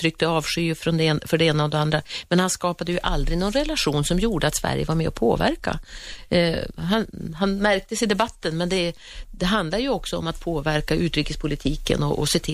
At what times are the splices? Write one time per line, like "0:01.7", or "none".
none